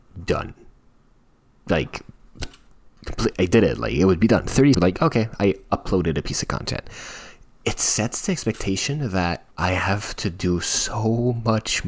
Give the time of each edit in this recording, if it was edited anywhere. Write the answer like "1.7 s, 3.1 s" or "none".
3.3 s, 4.7 s, 9.5 s